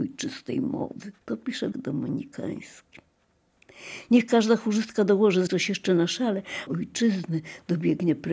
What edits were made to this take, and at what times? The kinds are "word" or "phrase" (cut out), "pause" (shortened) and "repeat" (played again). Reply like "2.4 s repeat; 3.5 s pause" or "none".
1.2 s pause; 1.7 s word; 5.5 s phrase; 6.7 s phrase